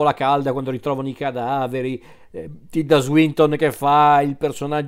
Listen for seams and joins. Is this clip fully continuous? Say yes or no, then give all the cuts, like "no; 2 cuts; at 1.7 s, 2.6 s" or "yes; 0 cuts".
yes; 0 cuts